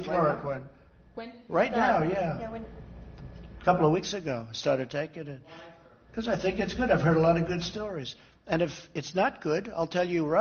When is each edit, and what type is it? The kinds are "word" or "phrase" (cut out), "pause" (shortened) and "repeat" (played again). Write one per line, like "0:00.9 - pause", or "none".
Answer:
none